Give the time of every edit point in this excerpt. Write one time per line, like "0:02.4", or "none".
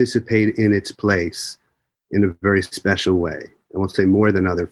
none